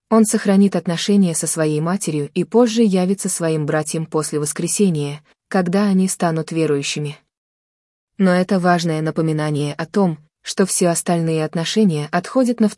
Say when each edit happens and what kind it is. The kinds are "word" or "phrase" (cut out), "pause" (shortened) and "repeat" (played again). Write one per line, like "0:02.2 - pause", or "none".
none